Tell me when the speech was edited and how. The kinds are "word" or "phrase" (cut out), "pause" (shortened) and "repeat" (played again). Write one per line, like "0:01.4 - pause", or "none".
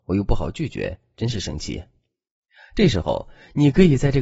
none